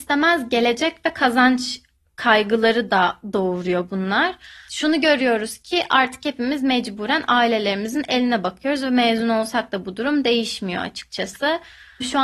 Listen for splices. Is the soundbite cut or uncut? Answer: uncut